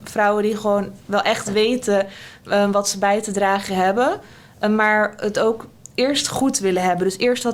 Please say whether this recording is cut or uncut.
uncut